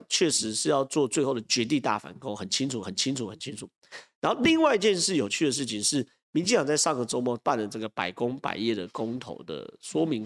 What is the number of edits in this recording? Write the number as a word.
one